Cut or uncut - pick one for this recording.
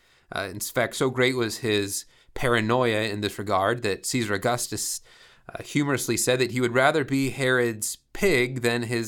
uncut